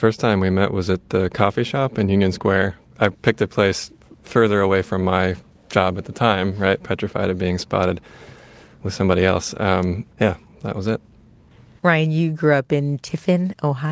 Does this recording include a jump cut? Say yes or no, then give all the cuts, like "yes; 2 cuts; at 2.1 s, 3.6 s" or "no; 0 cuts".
no; 0 cuts